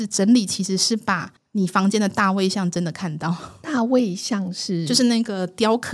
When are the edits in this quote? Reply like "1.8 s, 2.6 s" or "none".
1.4 s